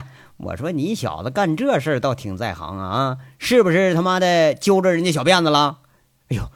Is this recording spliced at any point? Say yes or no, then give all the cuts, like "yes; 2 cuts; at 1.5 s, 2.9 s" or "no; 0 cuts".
no; 0 cuts